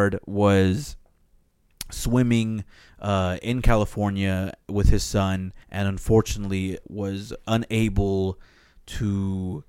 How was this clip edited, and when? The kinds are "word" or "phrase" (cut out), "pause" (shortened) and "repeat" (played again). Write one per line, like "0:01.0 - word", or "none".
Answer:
0:05.6 - pause
0:06.8 - word